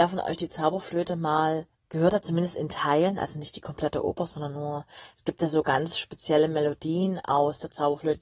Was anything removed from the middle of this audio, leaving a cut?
yes; 1 cut; at 1.7 s

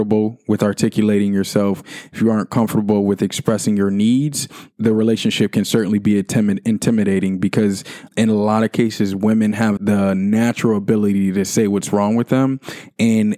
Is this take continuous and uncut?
no; 3 cuts; at 4.7 s, 8.1 s, 9.8 s

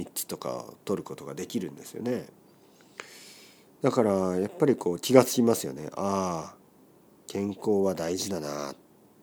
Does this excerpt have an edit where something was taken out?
no; 0 cuts

